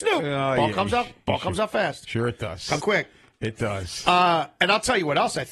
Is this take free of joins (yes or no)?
no